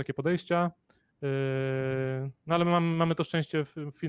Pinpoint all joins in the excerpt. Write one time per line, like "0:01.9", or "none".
none